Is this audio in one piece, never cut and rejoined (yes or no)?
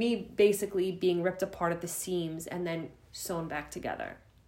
yes